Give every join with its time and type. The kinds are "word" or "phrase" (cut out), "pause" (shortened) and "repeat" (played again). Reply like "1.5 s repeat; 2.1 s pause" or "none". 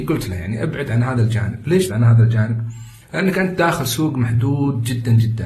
1.9 s word